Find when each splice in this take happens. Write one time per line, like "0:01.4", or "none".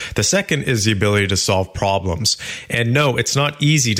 none